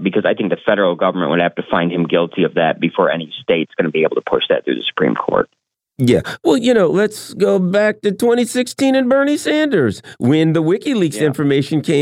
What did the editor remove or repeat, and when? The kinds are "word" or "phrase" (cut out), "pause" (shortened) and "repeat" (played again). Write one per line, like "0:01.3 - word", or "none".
none